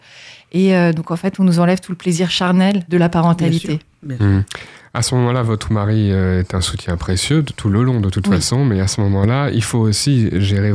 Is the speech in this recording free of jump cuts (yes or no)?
no